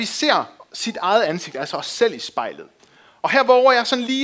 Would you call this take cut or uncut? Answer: uncut